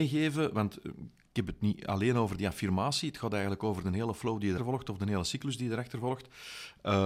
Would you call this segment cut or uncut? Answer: cut